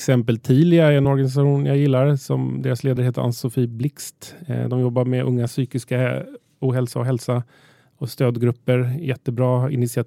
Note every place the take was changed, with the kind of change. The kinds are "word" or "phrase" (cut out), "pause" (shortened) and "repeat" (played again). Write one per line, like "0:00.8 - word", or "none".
none